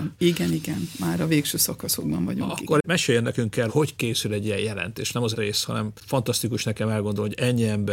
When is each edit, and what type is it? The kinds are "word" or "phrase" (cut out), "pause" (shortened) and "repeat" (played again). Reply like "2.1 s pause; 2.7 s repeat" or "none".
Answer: 3.7 s word; 5.3 s phrase